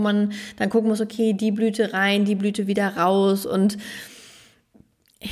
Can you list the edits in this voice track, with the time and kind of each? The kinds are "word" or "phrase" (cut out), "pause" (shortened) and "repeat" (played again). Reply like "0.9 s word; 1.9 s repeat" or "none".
none